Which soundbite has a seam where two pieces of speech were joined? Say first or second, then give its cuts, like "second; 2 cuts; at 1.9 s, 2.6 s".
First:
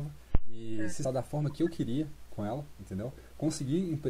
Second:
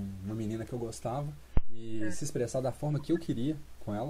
first; 1 cut; at 1.0 s